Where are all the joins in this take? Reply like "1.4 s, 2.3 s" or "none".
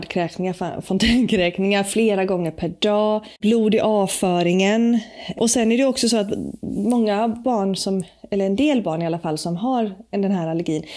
3.4 s